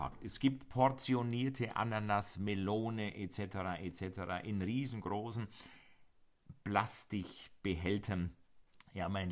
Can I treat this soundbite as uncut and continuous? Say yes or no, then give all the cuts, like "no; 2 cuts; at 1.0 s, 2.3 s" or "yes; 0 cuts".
yes; 0 cuts